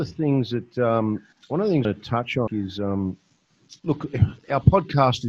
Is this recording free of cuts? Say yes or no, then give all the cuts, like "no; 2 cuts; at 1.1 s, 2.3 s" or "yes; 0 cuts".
no; 4 cuts; at 1.3 s, 1.8 s, 2.5 s, 3.8 s